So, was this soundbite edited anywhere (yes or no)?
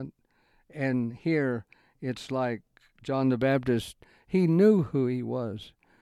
no